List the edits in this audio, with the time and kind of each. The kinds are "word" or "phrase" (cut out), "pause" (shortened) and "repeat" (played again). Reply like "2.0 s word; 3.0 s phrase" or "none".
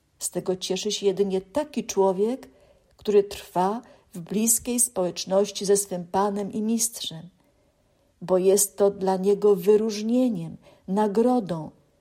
none